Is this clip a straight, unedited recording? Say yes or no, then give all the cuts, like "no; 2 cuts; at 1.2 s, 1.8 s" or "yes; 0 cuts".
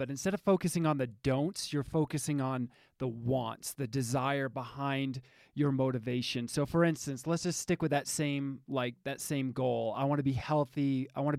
yes; 0 cuts